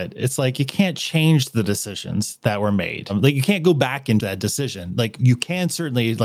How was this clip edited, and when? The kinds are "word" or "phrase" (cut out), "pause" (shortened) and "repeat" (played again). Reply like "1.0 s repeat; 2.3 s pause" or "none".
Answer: 4.2 s word